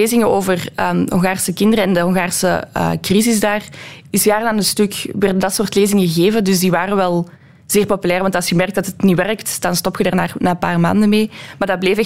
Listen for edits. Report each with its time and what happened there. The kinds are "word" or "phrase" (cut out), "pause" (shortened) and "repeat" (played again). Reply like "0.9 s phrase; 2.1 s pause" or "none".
none